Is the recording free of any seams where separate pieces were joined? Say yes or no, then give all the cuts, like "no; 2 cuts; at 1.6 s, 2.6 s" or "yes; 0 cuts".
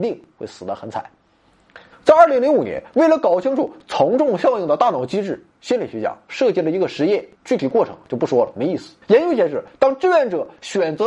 no; 4 cuts; at 1.9 s, 5.5 s, 7.3 s, 9.0 s